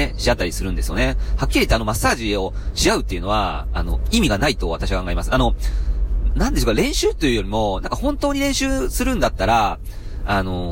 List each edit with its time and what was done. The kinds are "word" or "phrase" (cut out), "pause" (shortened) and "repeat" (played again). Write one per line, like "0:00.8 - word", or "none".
0:06.3 - word